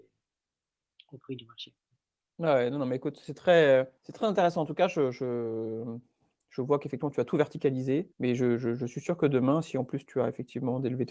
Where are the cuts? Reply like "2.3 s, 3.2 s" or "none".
4.0 s, 8.1 s